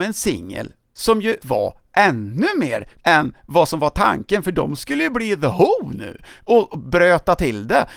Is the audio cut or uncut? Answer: cut